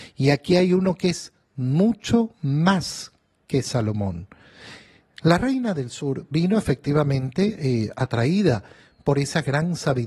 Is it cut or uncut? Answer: uncut